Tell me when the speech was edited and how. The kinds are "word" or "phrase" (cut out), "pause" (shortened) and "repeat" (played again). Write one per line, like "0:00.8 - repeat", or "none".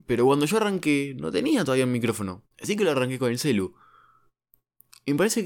0:02.5 - pause